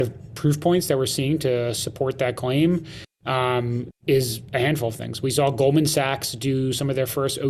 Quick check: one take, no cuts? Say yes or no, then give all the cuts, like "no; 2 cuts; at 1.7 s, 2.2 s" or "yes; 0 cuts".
yes; 0 cuts